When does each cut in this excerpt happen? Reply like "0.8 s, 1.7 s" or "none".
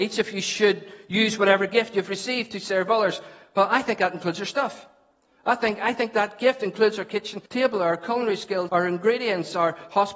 7.5 s, 8.7 s